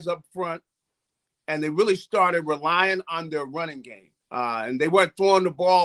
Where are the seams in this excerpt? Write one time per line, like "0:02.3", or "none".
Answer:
0:04.2